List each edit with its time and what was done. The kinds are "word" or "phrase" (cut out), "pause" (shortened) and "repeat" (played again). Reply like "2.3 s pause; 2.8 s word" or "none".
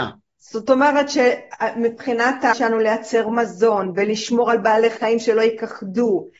2.5 s word